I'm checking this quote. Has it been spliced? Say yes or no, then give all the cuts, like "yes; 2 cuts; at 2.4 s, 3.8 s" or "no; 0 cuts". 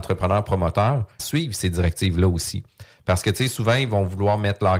yes; 1 cut; at 1.2 s